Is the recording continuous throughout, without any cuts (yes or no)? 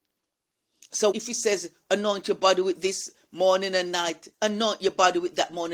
no